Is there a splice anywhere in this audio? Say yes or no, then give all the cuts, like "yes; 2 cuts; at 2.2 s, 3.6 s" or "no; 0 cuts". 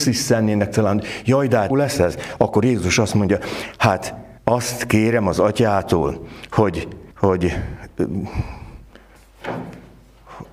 yes; 3 cuts; at 1.7 s, 4.4 s, 7.1 s